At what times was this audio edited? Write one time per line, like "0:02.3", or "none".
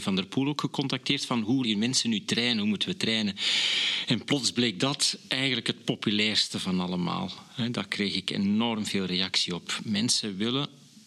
0:01.6